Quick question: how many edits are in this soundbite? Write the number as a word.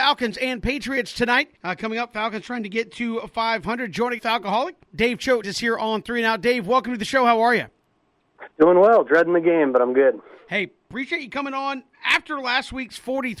six